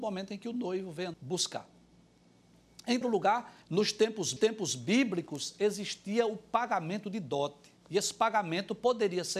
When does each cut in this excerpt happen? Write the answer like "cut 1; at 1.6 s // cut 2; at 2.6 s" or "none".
cut 1; at 1.1 s // cut 2; at 3.0 s // cut 3; at 3.6 s // cut 4; at 4.4 s // cut 5; at 7.8 s